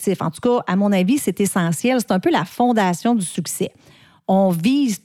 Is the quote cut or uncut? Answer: uncut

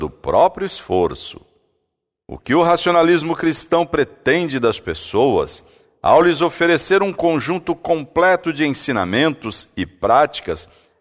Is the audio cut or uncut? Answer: uncut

